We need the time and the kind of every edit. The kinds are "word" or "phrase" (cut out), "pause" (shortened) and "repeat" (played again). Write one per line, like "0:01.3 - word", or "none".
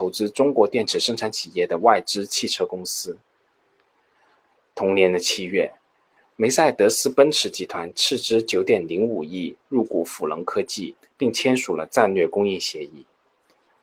none